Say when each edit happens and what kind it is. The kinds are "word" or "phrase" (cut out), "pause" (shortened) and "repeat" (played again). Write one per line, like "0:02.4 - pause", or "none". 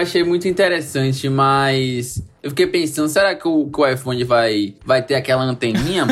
none

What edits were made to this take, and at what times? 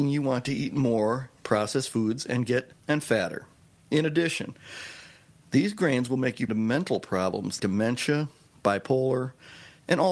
0:01.4 - word
0:02.7 - word
0:06.5 - word
0:07.6 - word

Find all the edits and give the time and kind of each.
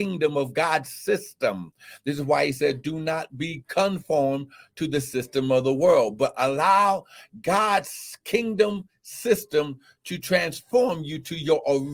none

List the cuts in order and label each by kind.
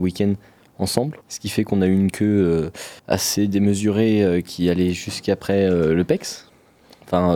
0:01.2 - pause
0:03.0 - pause

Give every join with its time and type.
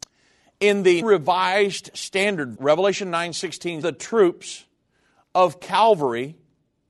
0:01.0 - word
0:02.6 - phrase
0:03.8 - phrase

